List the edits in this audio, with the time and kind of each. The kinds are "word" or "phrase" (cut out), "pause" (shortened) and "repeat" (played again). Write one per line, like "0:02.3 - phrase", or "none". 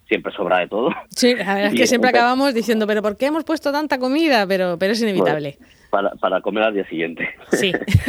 0:05.8 - pause